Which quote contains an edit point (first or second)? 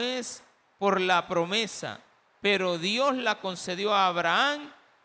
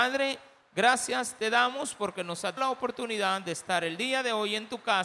second